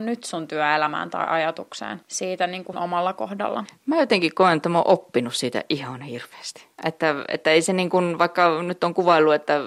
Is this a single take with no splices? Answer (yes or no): no